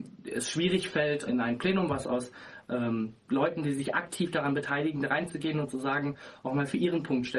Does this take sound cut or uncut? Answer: cut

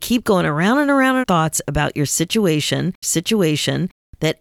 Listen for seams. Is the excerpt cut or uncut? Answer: cut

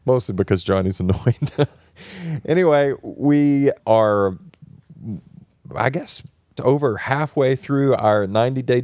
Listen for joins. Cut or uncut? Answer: cut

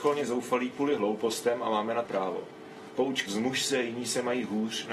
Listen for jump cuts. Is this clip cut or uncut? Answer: cut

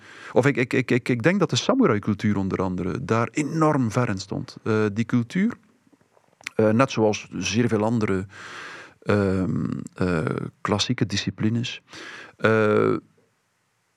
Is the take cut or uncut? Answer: uncut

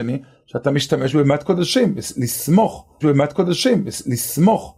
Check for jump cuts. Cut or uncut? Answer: cut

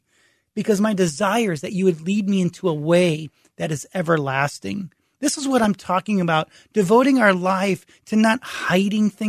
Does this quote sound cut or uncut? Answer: uncut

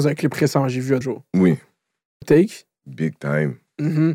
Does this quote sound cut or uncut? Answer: cut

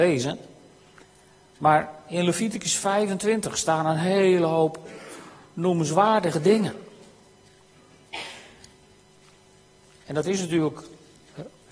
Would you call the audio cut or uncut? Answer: uncut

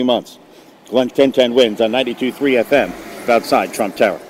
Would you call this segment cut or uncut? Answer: cut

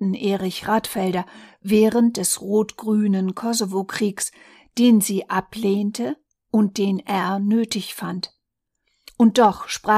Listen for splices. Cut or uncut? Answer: uncut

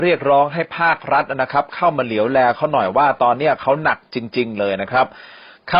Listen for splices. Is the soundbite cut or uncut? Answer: uncut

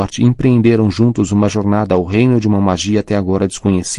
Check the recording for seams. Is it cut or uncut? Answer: uncut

